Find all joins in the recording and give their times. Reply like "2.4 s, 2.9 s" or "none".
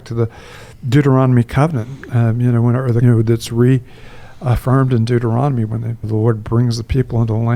3.0 s, 6.0 s